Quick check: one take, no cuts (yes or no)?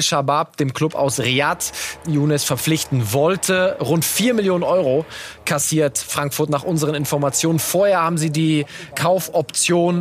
no